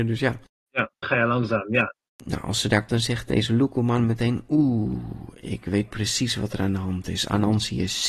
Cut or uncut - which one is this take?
cut